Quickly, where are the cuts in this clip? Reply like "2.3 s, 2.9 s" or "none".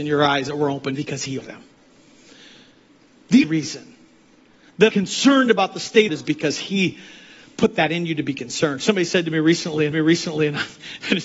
0.9 s, 1.4 s, 3.4 s, 4.9 s, 6.1 s, 9.9 s